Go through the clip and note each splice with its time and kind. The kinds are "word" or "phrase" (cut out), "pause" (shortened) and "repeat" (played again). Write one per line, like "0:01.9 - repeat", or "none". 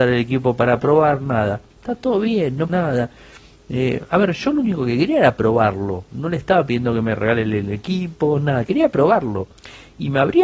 0:01.7 - pause
0:02.7 - word